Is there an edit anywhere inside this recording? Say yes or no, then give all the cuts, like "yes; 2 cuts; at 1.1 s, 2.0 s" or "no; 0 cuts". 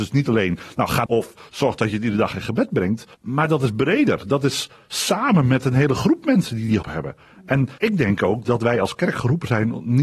yes; 4 cuts; at 1.1 s, 3.1 s, 6.8 s, 7.8 s